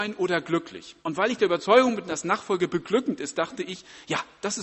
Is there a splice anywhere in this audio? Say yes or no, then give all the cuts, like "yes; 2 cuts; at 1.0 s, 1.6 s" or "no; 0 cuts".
yes; 1 cut; at 1.0 s